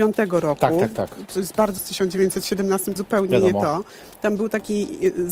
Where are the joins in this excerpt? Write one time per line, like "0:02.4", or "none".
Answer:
0:01.8
0:03.0